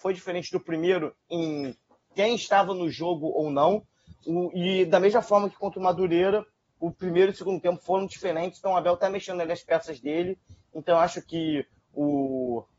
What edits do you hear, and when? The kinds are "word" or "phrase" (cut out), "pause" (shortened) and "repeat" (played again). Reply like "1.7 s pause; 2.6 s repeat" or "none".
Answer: none